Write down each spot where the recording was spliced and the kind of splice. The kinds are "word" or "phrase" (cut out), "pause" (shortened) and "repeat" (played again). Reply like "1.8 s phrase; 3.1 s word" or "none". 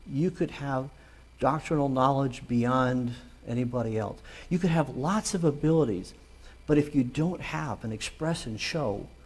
none